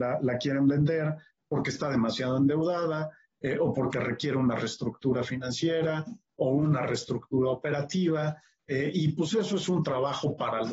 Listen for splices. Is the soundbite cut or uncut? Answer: uncut